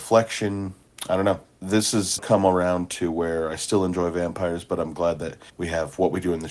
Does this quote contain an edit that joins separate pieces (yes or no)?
yes